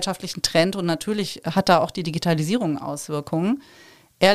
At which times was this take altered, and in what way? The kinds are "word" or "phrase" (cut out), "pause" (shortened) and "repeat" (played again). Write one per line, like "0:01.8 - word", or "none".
none

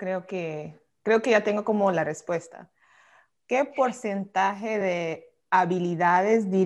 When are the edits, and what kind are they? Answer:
none

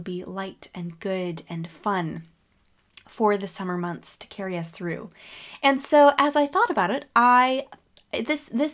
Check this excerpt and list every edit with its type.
none

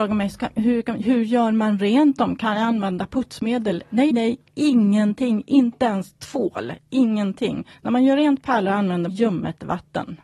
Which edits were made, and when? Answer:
0:04.1 - word
0:07.7 - pause
0:09.1 - word

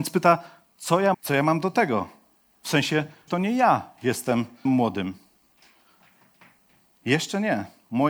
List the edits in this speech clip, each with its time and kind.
0:01.1 - word
0:03.3 - word
0:04.7 - word

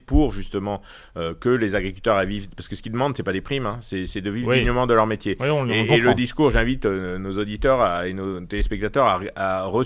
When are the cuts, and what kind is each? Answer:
none

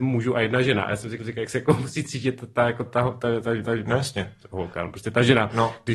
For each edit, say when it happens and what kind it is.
0:01.2 - repeat
0:02.9 - word
0:03.6 - repeat

